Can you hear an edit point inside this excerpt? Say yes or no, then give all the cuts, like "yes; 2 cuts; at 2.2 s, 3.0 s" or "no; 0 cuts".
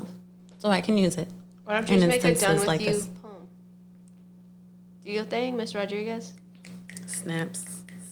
no; 0 cuts